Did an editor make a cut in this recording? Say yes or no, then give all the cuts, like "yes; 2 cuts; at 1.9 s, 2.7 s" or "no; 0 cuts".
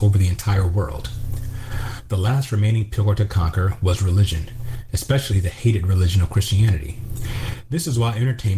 no; 0 cuts